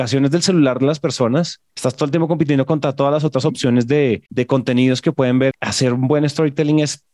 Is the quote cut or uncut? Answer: cut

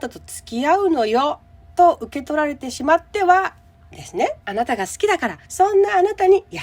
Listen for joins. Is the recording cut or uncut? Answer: cut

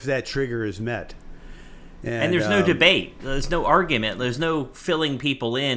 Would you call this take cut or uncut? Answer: uncut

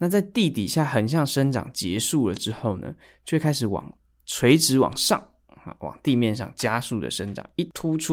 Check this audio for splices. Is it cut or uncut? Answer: uncut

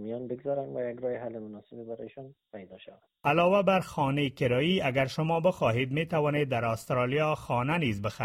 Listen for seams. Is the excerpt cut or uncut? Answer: uncut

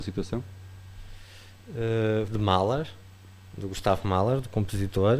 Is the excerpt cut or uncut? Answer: cut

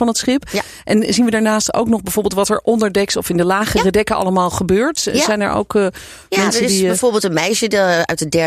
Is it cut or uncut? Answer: uncut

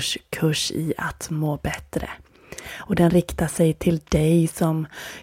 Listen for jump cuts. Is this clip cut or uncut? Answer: uncut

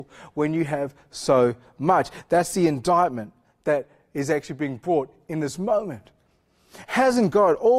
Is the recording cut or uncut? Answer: uncut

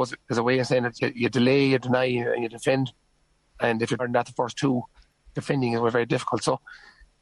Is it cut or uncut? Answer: cut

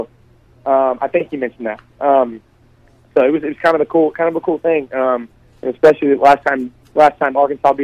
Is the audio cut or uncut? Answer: uncut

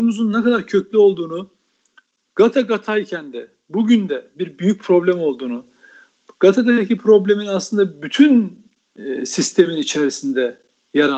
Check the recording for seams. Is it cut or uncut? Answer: uncut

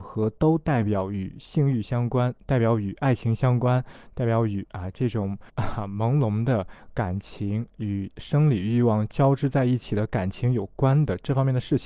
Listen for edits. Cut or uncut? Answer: cut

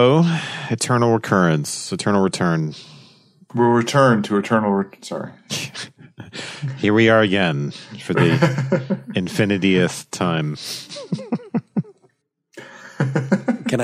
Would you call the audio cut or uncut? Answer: uncut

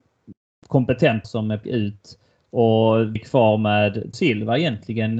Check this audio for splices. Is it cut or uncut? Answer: cut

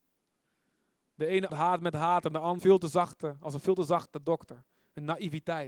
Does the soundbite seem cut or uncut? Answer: cut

